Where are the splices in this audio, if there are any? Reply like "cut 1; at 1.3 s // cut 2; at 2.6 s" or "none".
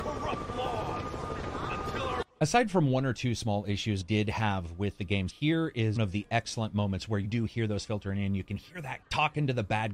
cut 1; at 4.0 s // cut 2; at 5.3 s // cut 3; at 6.0 s // cut 4; at 7.2 s // cut 5; at 7.8 s // cut 6; at 9.0 s